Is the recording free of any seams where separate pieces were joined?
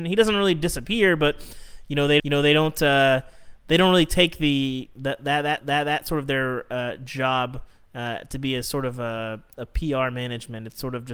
no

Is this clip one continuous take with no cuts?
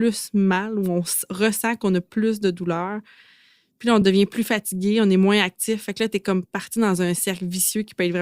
yes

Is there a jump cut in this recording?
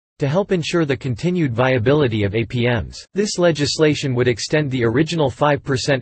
yes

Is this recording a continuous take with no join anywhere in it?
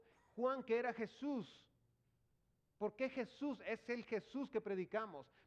yes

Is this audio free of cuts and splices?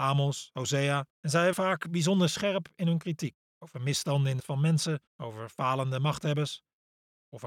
no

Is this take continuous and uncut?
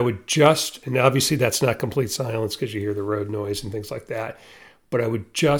yes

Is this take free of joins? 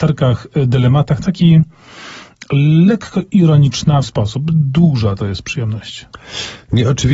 no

